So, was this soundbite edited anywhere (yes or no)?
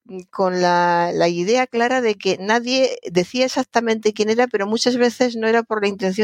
no